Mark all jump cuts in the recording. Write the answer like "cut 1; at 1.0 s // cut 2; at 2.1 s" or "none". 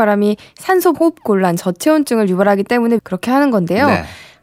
cut 1; at 0.9 s // cut 2; at 3.0 s